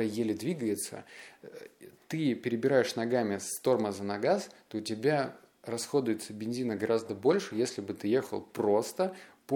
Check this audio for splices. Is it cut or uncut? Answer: uncut